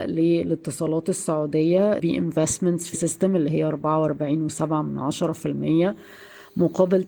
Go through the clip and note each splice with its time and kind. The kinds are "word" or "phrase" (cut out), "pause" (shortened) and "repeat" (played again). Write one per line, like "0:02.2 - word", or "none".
0:02.0 - phrase
0:02.9 - word